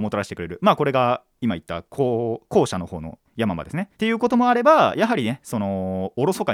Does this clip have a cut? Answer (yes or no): yes